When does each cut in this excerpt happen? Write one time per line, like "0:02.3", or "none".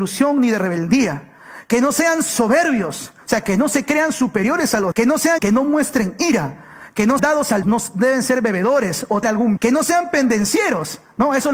0:04.9
0:05.4
0:07.2
0:07.6
0:09.2
0:09.6